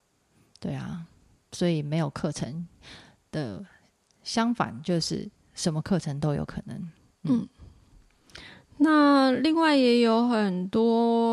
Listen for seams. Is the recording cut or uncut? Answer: uncut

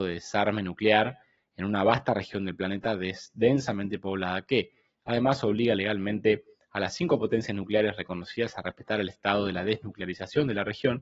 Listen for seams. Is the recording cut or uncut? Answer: uncut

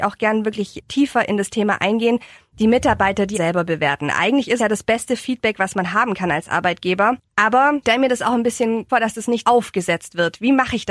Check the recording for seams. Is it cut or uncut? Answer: cut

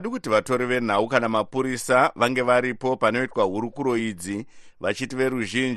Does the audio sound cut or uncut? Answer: uncut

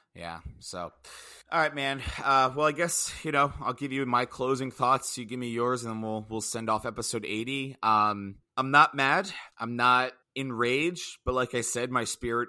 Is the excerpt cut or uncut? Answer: cut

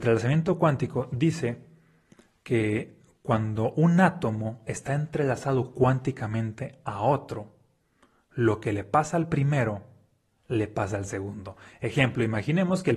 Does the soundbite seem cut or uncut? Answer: uncut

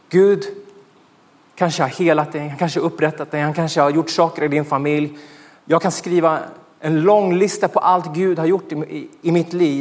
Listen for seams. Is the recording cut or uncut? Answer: uncut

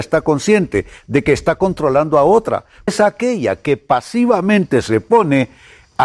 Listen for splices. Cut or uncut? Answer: cut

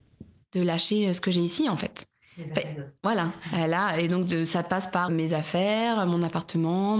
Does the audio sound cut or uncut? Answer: cut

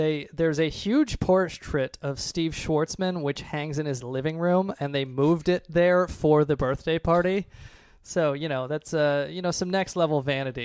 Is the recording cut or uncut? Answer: uncut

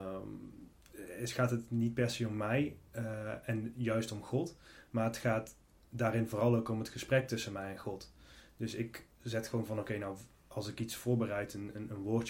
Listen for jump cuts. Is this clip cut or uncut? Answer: uncut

